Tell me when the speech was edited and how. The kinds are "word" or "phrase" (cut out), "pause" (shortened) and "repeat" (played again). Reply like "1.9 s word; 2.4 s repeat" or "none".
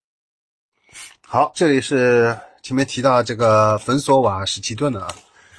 1.5 s word